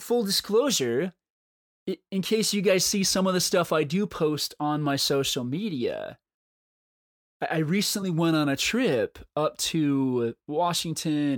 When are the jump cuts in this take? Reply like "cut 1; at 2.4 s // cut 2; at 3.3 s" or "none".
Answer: none